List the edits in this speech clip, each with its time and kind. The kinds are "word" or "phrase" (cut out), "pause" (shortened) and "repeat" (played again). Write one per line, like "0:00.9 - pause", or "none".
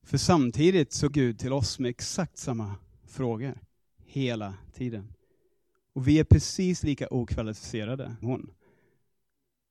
0:01.1 - word
0:08.2 - word